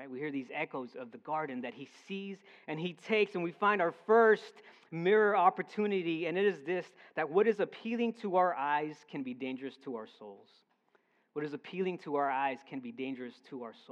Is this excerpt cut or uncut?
uncut